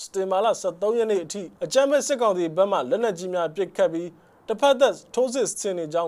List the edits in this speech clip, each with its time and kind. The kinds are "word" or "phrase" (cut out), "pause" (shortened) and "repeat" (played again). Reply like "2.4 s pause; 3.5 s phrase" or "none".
1.6 s pause